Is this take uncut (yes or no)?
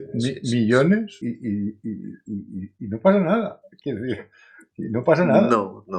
no